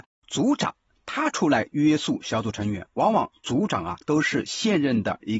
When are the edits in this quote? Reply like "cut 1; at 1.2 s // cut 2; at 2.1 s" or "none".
cut 1; at 4.0 s